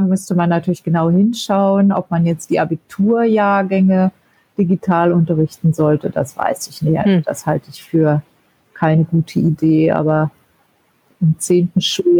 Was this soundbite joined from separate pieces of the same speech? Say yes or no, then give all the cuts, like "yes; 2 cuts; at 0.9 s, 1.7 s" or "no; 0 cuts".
no; 0 cuts